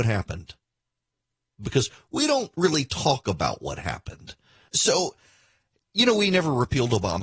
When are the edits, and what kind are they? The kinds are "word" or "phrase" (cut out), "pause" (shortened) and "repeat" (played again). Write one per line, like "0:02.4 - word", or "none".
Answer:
none